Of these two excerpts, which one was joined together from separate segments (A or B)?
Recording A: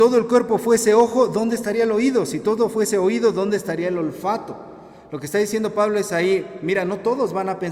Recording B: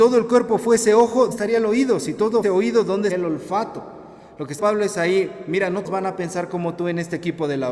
B